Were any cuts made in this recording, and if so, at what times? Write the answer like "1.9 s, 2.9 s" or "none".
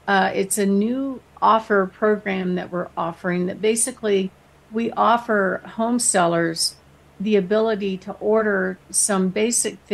none